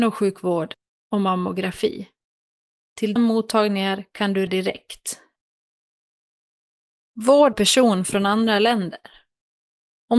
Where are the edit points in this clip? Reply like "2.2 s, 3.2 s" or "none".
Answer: 3.2 s, 4.5 s, 7.5 s

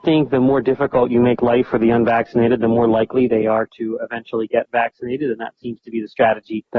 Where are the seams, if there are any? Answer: none

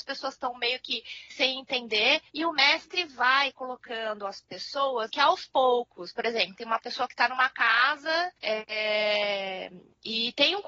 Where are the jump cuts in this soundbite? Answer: 1.3 s, 2.3 s, 5.1 s, 6.6 s, 8.4 s

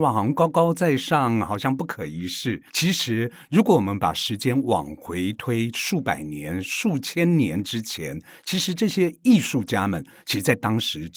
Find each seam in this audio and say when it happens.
2.7 s

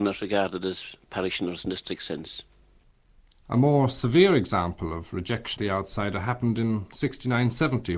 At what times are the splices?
5.6 s

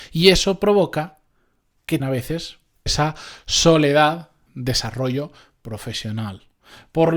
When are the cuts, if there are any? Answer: 2.0 s, 2.9 s, 4.5 s

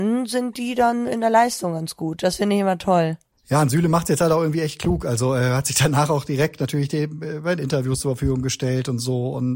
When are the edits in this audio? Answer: none

